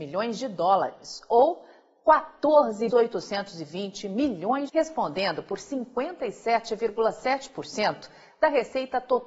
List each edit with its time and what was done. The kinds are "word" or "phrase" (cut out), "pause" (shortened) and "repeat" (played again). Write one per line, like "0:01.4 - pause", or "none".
0:02.9 - word
0:04.7 - phrase